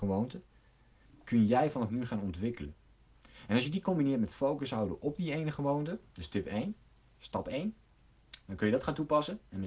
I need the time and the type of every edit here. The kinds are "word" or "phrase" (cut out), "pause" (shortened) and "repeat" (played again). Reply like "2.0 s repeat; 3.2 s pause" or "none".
none